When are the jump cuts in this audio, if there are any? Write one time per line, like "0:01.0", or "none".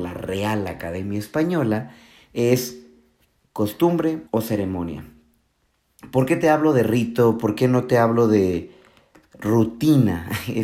0:04.3